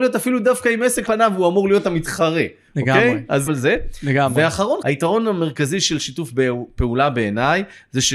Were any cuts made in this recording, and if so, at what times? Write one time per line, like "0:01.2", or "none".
0:01.1
0:03.5
0:04.8